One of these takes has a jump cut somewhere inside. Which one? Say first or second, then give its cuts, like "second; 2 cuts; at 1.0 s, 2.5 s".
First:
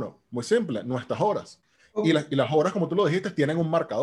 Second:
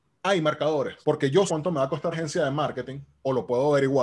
second; 3 cuts; at 1.0 s, 1.5 s, 2.1 s